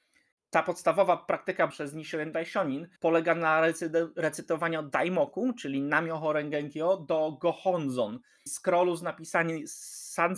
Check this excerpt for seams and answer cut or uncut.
cut